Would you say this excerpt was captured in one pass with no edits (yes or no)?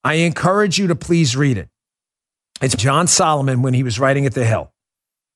no